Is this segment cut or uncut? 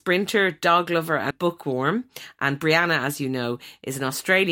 cut